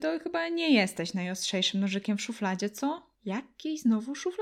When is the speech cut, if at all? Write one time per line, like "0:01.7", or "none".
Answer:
0:03.2